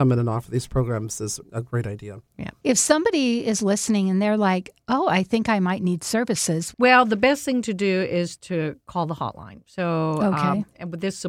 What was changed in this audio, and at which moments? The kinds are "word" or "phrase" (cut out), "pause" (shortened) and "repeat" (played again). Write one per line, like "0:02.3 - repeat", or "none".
0:01.4 - word